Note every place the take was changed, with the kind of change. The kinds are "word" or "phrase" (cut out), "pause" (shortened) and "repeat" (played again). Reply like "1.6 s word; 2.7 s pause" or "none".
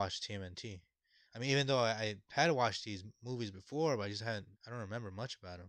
4.6 s pause